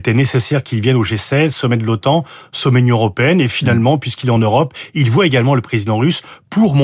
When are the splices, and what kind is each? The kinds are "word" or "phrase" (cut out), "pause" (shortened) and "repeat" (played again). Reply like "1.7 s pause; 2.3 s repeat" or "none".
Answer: none